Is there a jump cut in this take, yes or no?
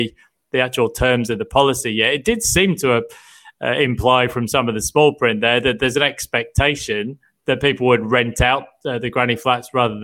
no